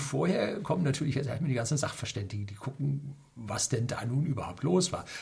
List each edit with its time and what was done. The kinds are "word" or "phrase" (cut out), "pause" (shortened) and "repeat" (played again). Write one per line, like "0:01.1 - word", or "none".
none